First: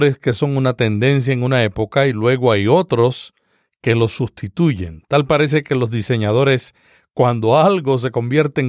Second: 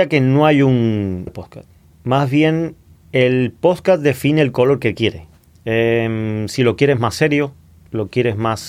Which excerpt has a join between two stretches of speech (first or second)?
second